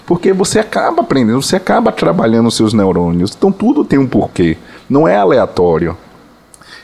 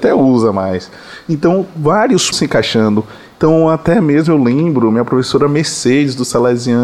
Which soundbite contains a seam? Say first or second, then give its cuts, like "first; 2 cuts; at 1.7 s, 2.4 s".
second; 1 cut; at 2.3 s